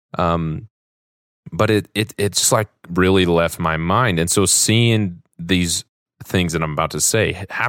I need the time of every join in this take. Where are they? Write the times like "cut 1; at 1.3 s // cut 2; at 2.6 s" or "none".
none